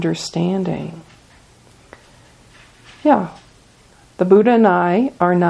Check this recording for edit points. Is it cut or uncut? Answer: uncut